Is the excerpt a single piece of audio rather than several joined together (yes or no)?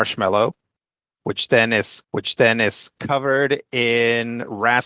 no